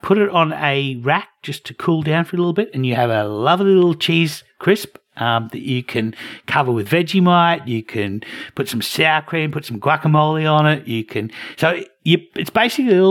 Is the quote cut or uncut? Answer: uncut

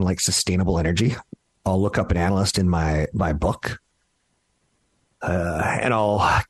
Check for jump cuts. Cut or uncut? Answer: uncut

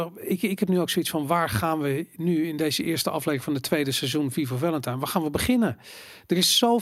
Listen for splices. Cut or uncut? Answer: uncut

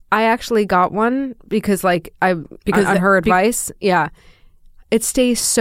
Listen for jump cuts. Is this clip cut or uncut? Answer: uncut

